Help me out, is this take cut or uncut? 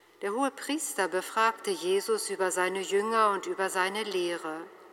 uncut